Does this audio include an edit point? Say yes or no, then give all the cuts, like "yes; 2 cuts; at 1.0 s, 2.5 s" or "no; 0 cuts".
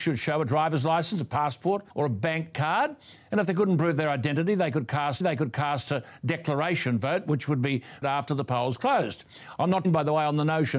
yes; 4 cuts; at 1.9 s, 5.2 s, 8.0 s, 9.8 s